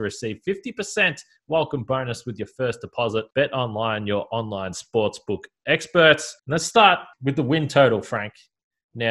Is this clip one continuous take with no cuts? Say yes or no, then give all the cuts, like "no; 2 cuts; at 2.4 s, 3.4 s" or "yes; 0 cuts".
no; 3 cuts; at 3.3 s, 6.4 s, 7.1 s